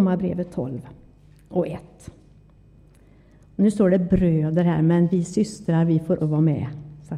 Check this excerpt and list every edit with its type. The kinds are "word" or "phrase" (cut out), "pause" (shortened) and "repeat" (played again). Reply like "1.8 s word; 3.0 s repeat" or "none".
6.2 s word